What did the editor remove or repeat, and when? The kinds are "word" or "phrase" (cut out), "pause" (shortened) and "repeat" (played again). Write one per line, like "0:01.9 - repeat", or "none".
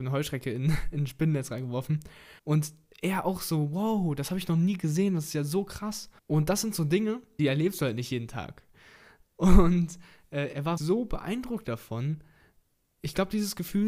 0:02.4 - pause
0:06.2 - pause
0:07.4 - phrase
0:10.8 - word